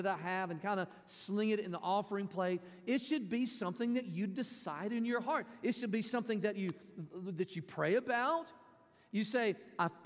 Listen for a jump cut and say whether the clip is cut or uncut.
uncut